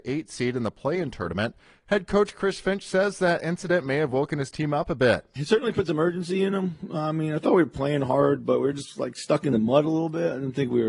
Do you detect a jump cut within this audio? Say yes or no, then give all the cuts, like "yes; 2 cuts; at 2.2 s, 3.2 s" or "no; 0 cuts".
no; 0 cuts